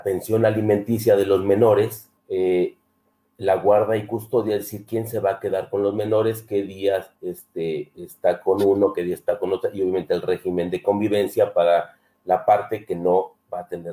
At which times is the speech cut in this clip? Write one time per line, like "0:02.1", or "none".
0:02.2
0:07.2